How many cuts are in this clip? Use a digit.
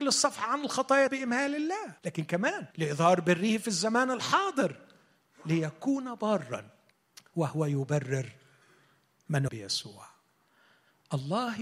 5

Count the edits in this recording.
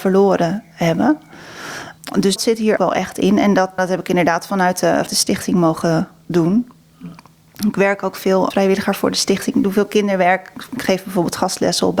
5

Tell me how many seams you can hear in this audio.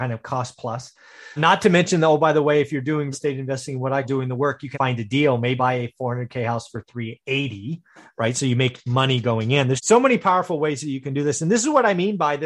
6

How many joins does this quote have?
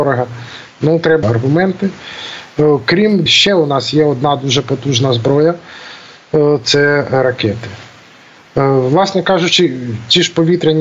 2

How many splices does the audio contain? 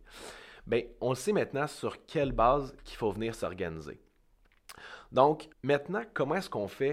1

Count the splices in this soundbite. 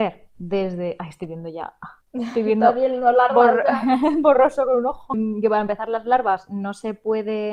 1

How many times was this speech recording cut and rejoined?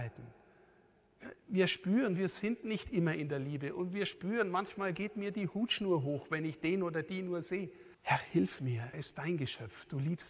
2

